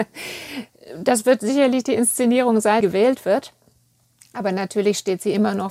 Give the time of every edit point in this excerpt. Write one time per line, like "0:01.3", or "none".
0:02.8